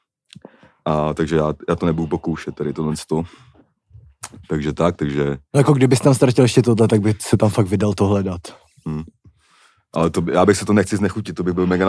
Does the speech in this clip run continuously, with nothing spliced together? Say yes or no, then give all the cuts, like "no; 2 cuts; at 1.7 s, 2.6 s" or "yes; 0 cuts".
yes; 0 cuts